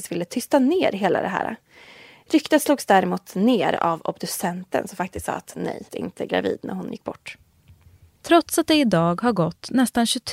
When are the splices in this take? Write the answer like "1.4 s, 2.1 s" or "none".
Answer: 5.9 s